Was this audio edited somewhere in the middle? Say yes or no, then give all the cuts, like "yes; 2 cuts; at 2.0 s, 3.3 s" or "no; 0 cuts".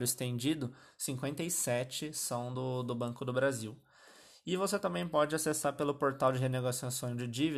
no; 0 cuts